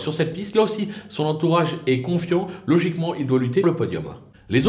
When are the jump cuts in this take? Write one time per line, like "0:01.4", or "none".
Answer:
0:03.6